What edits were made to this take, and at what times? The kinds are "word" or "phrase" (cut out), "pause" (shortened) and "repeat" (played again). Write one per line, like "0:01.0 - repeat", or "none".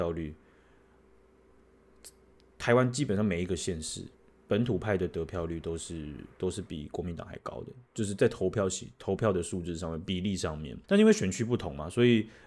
0:04.1 - pause
0:07.9 - pause
0:10.8 - pause

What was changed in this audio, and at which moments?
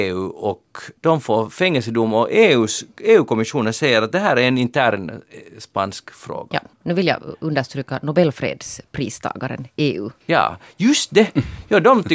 0:01.0 - pause
0:06.7 - pause
0:10.2 - pause

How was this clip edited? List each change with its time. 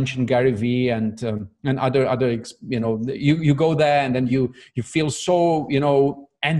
none

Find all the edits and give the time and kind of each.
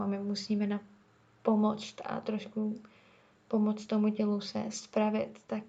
none

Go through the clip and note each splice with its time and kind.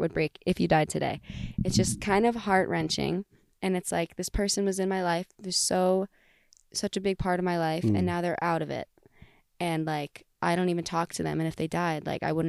none

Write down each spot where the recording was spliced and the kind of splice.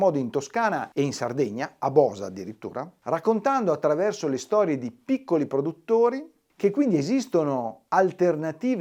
none

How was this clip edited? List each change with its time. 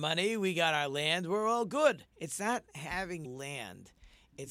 0:02.1 - pause
0:03.2 - word

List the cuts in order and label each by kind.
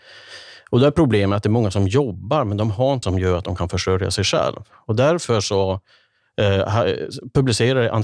0:03.0 - word

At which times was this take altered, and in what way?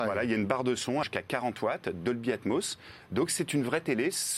0:01.0 - word

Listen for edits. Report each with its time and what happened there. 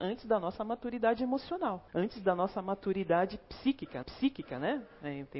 0:01.9 - pause
0:04.0 - repeat

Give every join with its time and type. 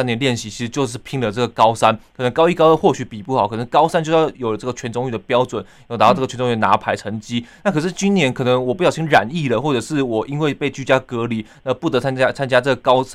none

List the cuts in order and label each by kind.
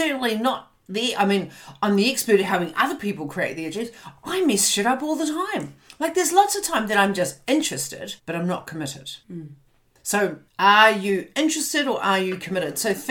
0:08.2 - pause
0:09.2 - pause
0:10.5 - pause

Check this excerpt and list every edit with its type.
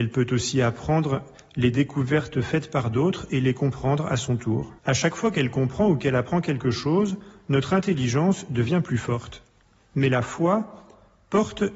0:04.8 - pause

